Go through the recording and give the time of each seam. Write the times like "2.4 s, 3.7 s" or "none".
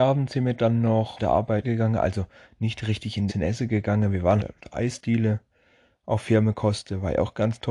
1.2 s, 1.6 s, 3.3 s, 4.4 s